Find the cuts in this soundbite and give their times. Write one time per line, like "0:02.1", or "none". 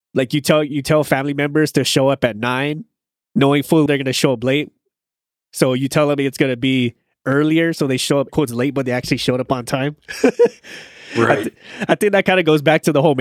0:03.9
0:08.3